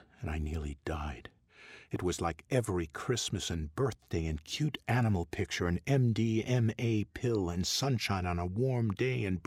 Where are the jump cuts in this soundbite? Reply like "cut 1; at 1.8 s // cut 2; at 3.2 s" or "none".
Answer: none